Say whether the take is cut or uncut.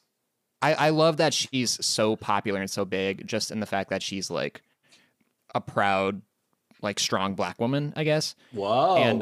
uncut